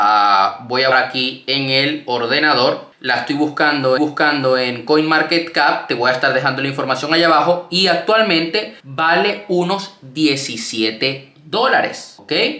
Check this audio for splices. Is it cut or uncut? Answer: cut